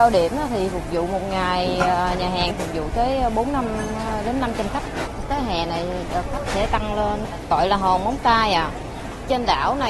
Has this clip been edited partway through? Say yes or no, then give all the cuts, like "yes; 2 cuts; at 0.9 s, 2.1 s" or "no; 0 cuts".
no; 0 cuts